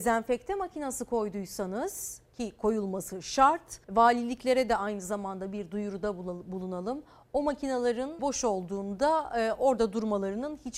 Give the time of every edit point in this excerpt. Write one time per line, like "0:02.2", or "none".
0:03.8
0:08.2